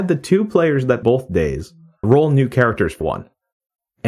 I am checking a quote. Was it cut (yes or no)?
yes